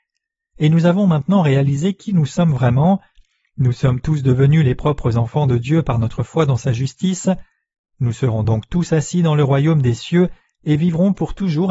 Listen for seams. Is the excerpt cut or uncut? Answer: uncut